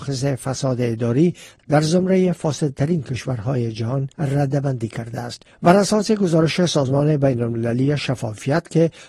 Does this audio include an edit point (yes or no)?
yes